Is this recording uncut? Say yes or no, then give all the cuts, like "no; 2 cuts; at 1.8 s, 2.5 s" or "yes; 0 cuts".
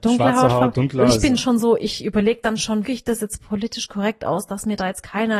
no; 2 cuts; at 1.4 s, 2.8 s